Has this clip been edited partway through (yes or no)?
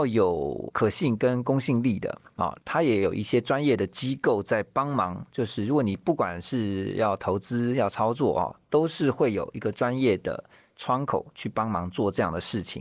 no